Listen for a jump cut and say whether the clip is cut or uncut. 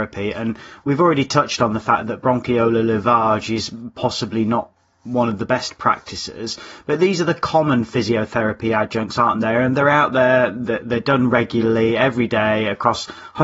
uncut